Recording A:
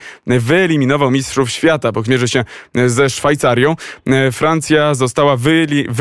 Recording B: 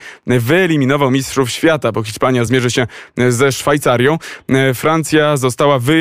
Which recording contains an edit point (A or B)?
A